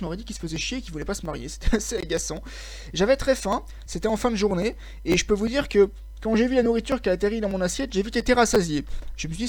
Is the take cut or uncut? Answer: uncut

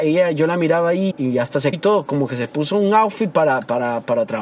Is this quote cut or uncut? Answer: cut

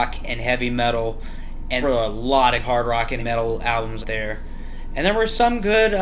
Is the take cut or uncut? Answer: cut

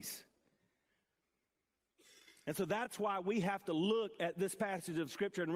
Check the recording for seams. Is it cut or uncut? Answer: uncut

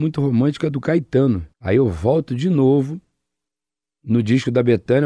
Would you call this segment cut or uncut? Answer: cut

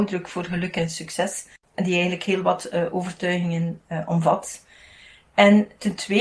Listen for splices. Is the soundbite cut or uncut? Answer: cut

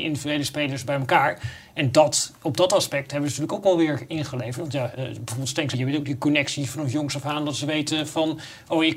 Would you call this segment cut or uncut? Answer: cut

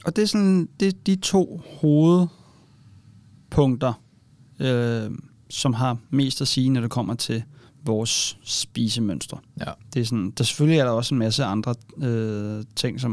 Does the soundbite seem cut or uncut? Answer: cut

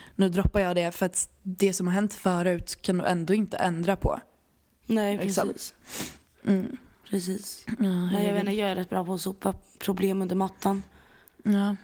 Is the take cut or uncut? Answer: uncut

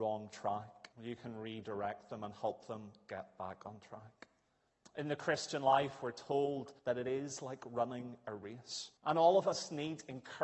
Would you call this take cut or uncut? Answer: cut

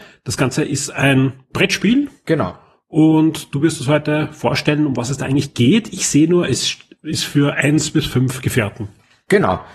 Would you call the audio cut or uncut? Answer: uncut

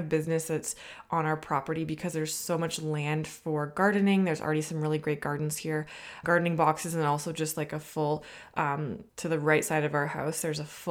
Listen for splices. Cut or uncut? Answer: cut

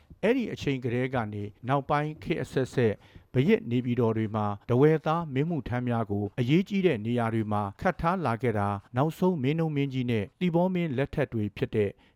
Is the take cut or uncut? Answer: cut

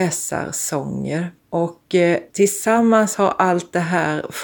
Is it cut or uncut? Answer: cut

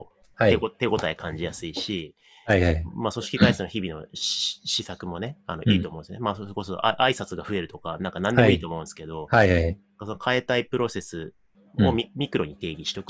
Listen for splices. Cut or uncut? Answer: uncut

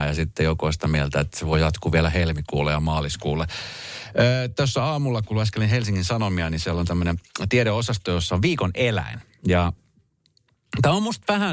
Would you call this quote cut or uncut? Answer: uncut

